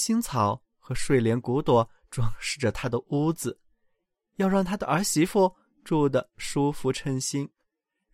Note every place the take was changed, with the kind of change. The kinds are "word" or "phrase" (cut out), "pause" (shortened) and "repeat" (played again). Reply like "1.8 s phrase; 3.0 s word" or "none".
none